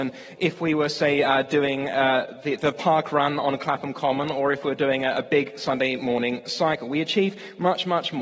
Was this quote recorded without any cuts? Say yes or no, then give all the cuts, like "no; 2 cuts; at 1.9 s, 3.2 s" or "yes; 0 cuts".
yes; 0 cuts